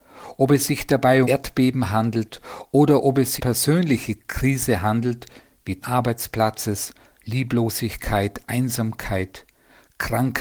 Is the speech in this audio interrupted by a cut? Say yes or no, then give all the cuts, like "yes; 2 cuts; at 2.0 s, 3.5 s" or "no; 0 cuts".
yes; 3 cuts; at 1.2 s, 3.4 s, 5.8 s